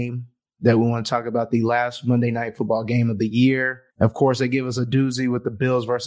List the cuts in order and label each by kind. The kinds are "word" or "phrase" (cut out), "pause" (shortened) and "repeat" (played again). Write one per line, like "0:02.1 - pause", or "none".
0:03.9 - pause